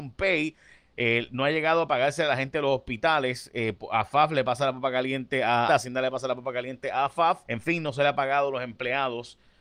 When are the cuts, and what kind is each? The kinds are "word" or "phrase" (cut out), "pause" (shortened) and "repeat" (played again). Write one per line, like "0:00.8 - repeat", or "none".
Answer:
0:05.7 - word
0:07.4 - pause